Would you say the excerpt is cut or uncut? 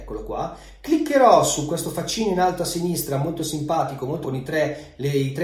cut